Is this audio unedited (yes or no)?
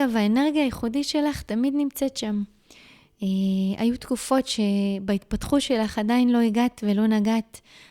yes